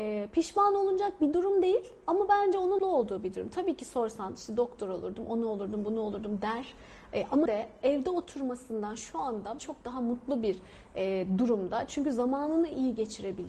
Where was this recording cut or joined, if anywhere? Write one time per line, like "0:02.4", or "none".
0:02.8
0:07.5
0:09.6